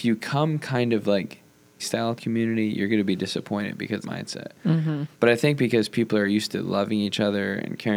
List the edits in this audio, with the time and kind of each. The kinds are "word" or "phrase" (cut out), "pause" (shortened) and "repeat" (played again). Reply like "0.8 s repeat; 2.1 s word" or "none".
1.8 s word; 2.2 s phrase; 4.0 s phrase; 5.1 s pause